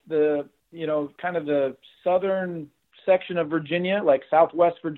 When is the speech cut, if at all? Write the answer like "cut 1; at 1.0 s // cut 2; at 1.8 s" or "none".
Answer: none